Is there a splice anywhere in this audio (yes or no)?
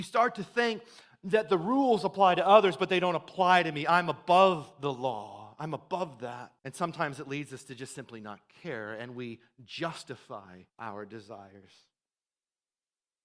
yes